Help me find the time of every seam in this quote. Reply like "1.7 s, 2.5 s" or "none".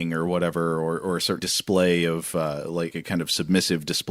1.4 s, 2.9 s